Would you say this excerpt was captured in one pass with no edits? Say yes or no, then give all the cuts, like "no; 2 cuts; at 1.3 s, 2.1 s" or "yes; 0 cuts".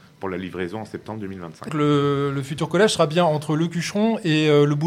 no; 1 cut; at 1.7 s